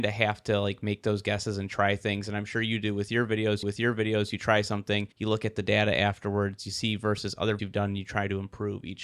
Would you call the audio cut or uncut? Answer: cut